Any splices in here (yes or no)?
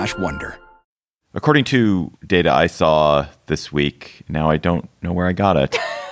yes